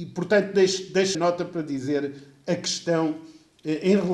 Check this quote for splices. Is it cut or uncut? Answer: cut